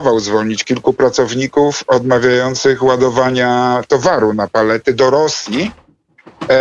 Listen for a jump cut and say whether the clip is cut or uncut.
uncut